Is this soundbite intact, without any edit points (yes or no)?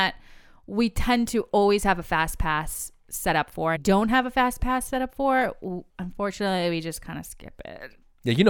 no